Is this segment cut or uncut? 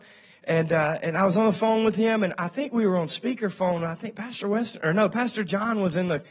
uncut